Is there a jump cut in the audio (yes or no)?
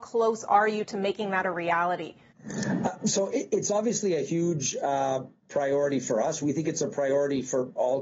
no